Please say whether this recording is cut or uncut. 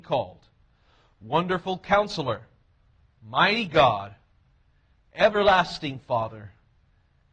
uncut